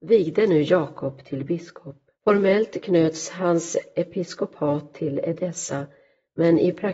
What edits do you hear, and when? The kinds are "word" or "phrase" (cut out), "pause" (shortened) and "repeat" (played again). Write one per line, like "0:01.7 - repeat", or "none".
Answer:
0:02.1 - pause